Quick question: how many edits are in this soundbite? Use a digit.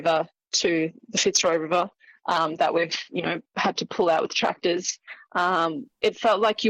1